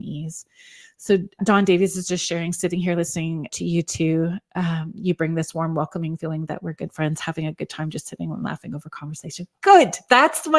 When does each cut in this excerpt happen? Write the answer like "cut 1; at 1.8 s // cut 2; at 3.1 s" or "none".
cut 1; at 1.4 s // cut 2; at 3.5 s